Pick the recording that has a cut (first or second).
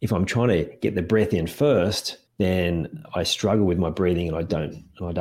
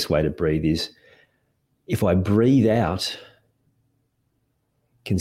first